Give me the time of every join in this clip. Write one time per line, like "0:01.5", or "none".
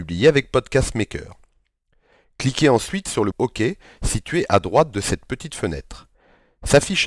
0:03.3